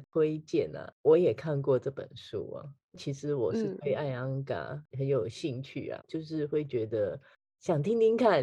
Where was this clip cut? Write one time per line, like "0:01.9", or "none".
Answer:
0:06.0